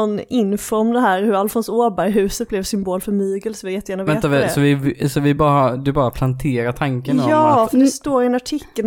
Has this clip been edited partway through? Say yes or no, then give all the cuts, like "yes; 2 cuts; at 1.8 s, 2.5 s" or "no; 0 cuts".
no; 0 cuts